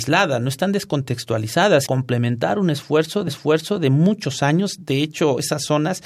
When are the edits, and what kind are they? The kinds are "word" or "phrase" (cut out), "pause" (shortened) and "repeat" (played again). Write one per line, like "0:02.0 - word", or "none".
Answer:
0:01.9 - phrase
0:03.3 - repeat